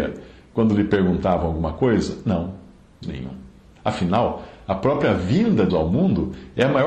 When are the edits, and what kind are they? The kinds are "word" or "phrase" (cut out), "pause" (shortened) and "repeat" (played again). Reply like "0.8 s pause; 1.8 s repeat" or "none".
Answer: 3.0 s word; 5.7 s word